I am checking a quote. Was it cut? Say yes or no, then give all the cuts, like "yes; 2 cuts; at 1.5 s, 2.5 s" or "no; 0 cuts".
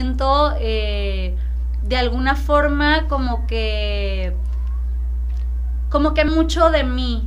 yes; 2 cuts; at 1.8 s, 6.3 s